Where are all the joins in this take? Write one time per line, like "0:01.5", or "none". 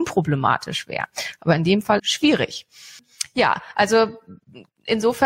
0:02.0